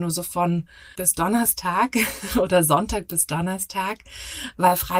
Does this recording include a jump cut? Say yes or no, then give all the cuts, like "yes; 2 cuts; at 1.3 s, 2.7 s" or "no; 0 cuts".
yes; 1 cut; at 0.9 s